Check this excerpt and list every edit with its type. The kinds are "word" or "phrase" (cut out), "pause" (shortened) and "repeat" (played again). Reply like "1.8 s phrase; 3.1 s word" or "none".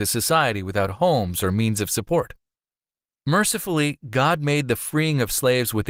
none